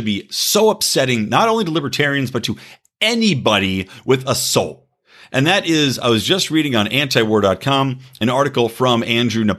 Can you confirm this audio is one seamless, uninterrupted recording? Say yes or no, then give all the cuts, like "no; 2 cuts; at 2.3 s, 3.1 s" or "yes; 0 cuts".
yes; 0 cuts